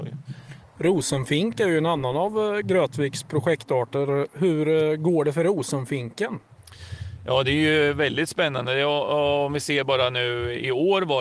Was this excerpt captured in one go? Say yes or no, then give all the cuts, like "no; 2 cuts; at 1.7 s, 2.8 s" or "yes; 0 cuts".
yes; 0 cuts